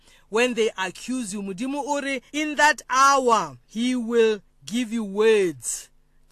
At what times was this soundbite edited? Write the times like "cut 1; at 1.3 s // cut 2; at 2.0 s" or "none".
cut 1; at 2.3 s // cut 2; at 3.6 s